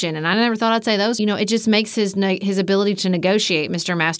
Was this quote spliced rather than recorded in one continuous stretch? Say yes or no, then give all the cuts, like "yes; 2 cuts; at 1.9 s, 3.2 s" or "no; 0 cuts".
yes; 1 cut; at 1.2 s